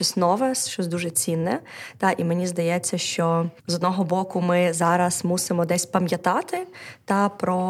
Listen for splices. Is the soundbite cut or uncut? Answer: cut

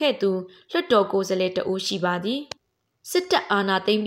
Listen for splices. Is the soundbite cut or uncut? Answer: cut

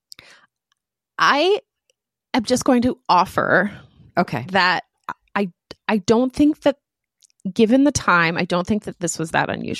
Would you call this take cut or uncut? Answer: uncut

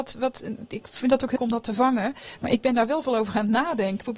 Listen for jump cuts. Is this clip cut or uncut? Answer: cut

